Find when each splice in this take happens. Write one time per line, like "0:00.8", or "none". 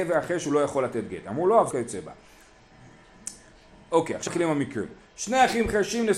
0:01.7
0:04.3